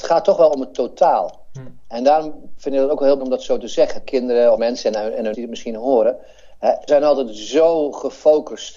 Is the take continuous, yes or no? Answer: no